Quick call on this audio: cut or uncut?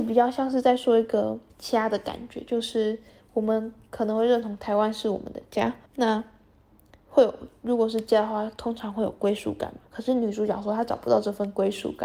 cut